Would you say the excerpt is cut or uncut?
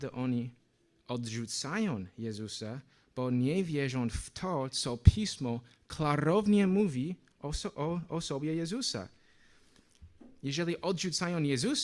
uncut